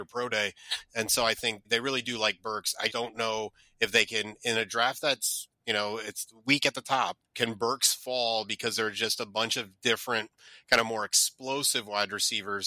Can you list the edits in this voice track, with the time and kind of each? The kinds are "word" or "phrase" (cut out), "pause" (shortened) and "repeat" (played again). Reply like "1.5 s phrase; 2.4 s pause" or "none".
1.6 s word; 2.9 s word; 5.5 s pause; 7.2 s pause